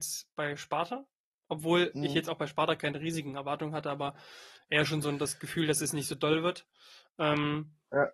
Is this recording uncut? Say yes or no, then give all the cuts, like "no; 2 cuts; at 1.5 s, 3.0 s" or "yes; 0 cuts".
yes; 0 cuts